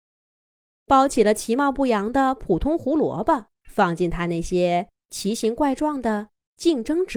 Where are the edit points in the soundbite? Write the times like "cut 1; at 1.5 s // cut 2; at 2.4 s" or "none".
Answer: cut 1; at 3.5 s

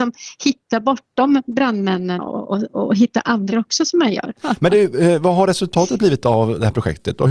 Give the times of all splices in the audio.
cut 1; at 2.2 s // cut 2; at 3.5 s

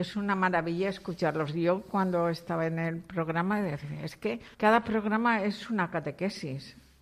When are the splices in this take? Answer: cut 1; at 4.5 s

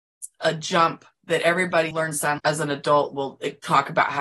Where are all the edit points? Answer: cut 1; at 1.9 s // cut 2; at 2.4 s

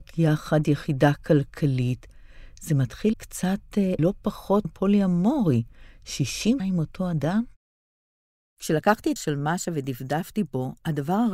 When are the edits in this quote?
cut 1; at 3.1 s // cut 2; at 4.0 s // cut 3; at 4.6 s // cut 4; at 6.6 s // cut 5; at 9.2 s

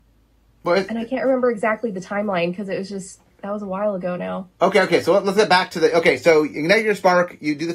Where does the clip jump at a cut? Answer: none

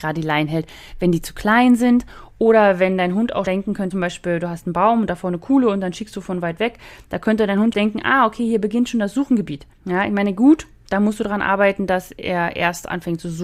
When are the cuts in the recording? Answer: cut 1; at 3.4 s // cut 2; at 3.9 s // cut 3; at 7.7 s // cut 4; at 9.7 s

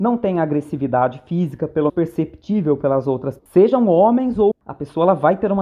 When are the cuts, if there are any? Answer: cut 1; at 1.9 s // cut 2; at 3.4 s // cut 3; at 4.5 s

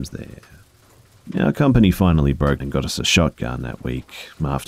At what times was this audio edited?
cut 1; at 2.6 s

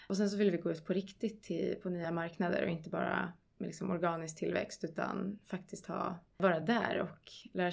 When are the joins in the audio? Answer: none

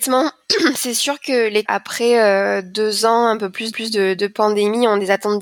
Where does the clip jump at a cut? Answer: cut 1; at 1.6 s // cut 2; at 3.7 s

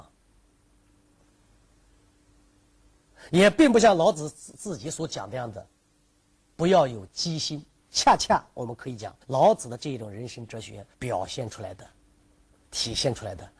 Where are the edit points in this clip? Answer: cut 1; at 9.2 s // cut 2; at 10.9 s

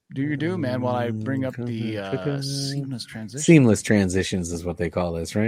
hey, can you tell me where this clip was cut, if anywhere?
none

